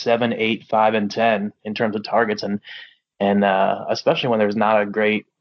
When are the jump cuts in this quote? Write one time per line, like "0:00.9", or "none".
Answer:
none